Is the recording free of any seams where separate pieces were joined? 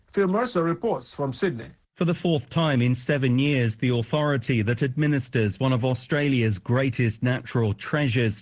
yes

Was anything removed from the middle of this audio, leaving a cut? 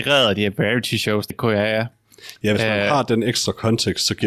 yes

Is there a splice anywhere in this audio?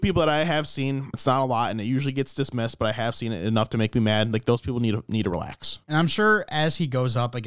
yes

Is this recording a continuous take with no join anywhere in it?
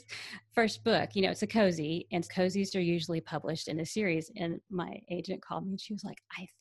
no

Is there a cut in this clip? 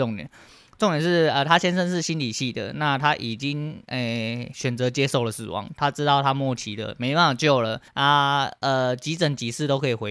yes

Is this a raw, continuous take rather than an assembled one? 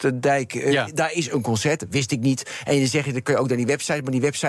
yes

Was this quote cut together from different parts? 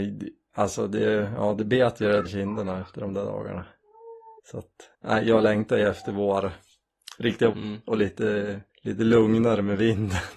yes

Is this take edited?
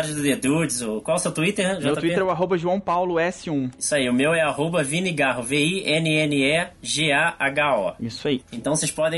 no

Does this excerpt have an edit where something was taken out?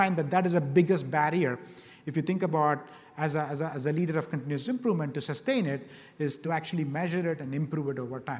no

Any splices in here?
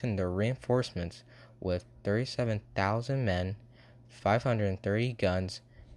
no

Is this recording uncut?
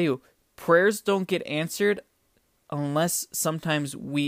yes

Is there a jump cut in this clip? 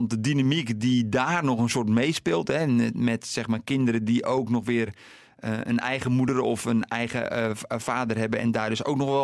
no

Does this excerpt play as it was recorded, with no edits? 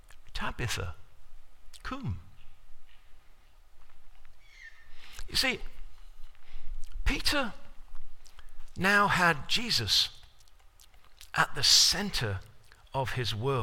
yes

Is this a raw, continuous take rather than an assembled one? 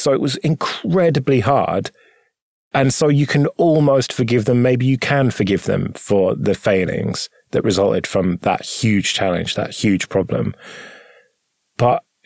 yes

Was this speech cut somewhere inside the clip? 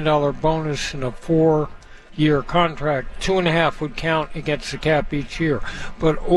no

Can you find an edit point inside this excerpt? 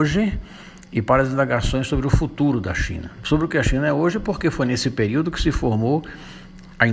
no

